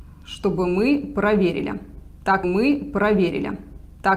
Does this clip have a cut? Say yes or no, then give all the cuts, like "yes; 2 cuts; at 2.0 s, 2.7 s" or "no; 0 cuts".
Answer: yes; 1 cut; at 2.4 s